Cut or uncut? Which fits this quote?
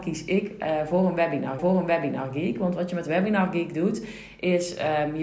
cut